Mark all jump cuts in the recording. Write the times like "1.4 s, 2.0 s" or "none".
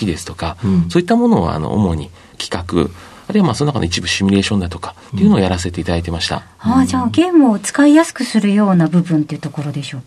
none